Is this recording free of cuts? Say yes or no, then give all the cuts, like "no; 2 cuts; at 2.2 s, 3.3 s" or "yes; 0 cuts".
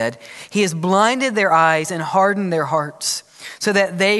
yes; 0 cuts